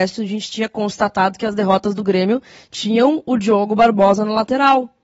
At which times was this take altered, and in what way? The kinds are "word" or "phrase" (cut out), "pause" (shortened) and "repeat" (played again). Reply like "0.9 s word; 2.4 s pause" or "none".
none